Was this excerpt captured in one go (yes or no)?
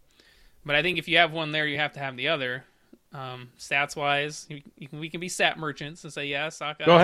yes